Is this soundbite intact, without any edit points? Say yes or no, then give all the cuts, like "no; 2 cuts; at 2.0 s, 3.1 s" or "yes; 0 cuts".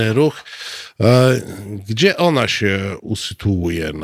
yes; 0 cuts